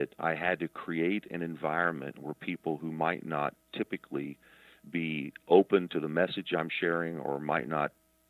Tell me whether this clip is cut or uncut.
uncut